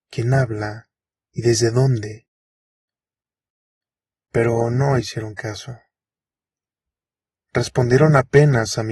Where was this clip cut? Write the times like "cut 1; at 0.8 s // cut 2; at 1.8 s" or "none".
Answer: none